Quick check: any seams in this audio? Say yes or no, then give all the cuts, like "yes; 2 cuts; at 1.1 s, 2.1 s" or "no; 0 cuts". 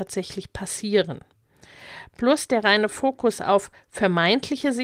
no; 0 cuts